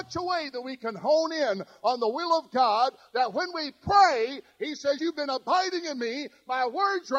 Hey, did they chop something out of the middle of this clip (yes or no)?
yes